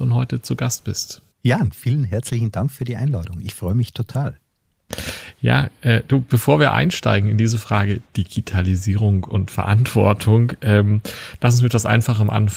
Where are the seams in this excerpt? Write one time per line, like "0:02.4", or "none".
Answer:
0:01.3
0:08.1